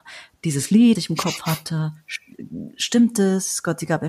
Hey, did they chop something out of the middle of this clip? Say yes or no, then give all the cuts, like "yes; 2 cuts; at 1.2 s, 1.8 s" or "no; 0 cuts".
yes; 1 cut; at 0.9 s